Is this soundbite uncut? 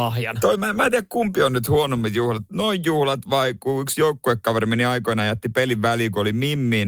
yes; 0 cuts

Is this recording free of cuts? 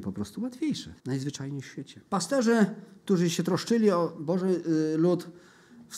no; 2 cuts; at 1.0 s, 2.1 s

